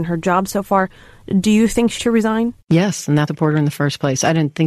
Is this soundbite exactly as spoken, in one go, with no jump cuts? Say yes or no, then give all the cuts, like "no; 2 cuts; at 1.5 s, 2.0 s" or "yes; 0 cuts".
no; 3 cuts; at 2.0 s, 2.6 s, 3.3 s